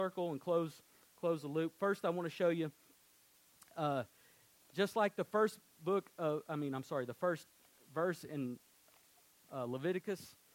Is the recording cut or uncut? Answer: uncut